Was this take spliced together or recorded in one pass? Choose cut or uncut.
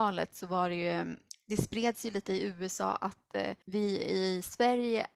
cut